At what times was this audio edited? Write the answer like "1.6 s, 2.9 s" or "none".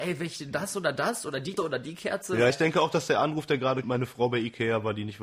1.6 s, 2.5 s, 3.8 s